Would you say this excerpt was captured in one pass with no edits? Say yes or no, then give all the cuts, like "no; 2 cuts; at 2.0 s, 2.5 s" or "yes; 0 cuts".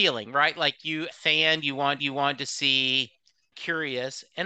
no; 3 cuts; at 1.1 s, 2.0 s, 3.5 s